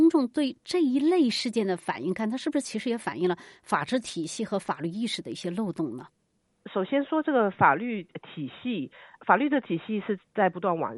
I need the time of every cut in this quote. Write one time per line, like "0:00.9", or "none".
none